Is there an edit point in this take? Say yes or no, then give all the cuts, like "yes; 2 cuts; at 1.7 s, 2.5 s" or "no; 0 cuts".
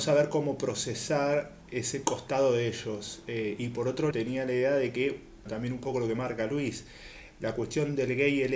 yes; 2 cuts; at 4.1 s, 5.5 s